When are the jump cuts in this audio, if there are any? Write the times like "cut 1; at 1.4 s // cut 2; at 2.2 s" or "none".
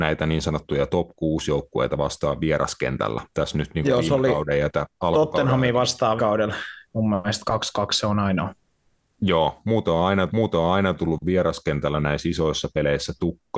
cut 1; at 3.3 s // cut 2; at 6.2 s // cut 3; at 10.3 s